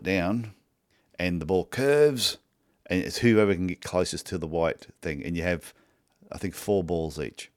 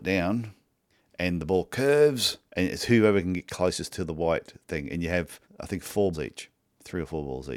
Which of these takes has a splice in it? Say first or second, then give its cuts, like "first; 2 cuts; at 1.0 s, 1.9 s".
second; 3 cuts; at 2.5 s, 5.4 s, 6.1 s